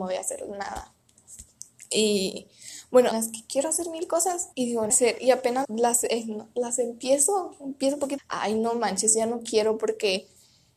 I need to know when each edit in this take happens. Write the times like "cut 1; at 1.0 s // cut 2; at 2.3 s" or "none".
cut 1; at 3.1 s // cut 2; at 4.5 s // cut 3; at 4.9 s // cut 4; at 5.6 s // cut 5; at 8.2 s